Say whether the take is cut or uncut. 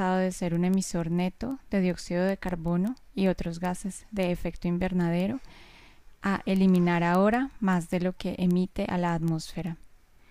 uncut